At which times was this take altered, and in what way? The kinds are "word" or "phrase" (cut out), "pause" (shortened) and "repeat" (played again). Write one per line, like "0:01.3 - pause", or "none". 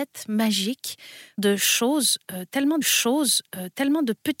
0:01.4 - phrase
0:02.8 - repeat